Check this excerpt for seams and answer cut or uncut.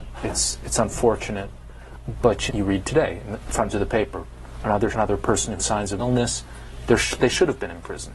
cut